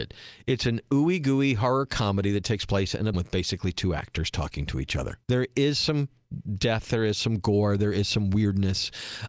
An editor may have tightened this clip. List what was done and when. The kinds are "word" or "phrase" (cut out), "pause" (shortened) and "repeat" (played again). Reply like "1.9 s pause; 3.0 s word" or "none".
3.1 s word; 5.2 s pause